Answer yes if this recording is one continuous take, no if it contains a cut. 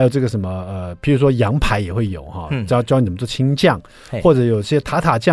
yes